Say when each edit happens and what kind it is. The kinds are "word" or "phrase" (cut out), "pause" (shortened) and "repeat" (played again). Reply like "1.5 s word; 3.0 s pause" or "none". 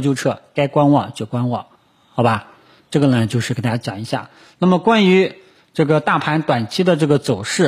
1.8 s pause